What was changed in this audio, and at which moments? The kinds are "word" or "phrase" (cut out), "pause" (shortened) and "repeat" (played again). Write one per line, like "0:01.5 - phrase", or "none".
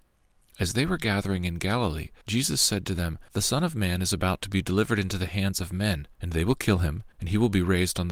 0:02.2 - pause
0:03.3 - pause
0:06.1 - pause
0:07.1 - pause